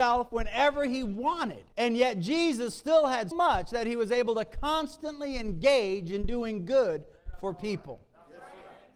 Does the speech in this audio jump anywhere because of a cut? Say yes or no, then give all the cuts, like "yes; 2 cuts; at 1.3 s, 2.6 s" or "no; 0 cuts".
yes; 2 cuts; at 1.7 s, 3.3 s